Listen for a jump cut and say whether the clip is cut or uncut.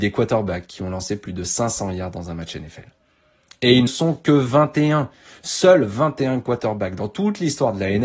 cut